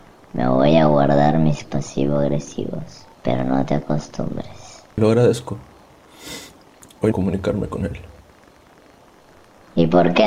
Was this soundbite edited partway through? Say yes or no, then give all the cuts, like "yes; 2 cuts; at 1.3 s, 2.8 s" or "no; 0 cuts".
yes; 4 cuts; at 1.6 s, 3.1 s, 4.9 s, 7.1 s